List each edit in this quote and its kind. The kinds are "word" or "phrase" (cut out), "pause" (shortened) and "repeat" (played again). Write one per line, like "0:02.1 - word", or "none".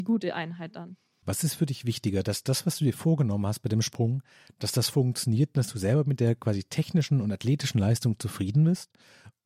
none